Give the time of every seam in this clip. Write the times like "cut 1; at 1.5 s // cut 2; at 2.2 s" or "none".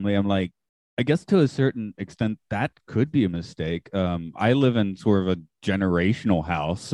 none